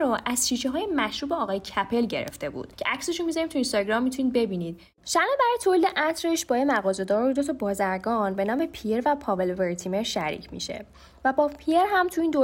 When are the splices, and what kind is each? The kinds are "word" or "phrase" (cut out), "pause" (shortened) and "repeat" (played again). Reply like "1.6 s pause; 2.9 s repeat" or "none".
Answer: none